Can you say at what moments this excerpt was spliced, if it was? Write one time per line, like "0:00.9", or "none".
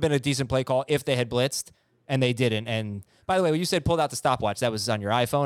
none